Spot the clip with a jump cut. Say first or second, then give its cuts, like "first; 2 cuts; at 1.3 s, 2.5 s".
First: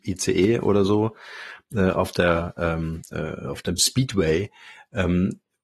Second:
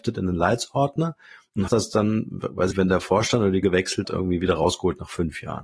second; 4 cuts; at 1.7 s, 2.7 s, 3.6 s, 4.0 s